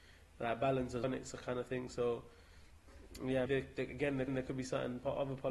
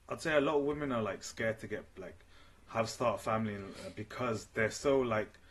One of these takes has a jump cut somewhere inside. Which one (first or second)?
first